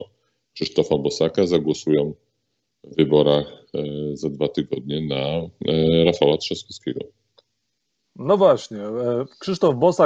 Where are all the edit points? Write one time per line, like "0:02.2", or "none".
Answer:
none